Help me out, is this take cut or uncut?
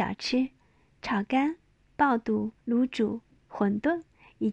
cut